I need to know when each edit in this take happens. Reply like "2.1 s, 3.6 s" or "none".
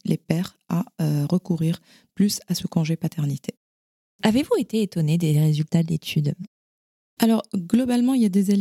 none